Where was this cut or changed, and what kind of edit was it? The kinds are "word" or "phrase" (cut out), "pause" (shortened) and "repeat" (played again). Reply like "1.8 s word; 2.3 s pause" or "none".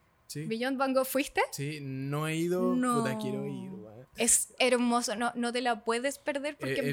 none